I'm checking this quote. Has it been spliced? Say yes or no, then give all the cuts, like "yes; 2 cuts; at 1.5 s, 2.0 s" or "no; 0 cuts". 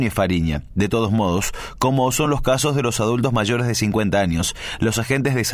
no; 0 cuts